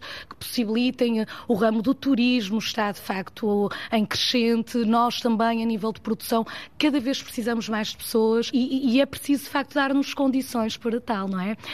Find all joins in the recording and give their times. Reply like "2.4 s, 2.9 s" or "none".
8.5 s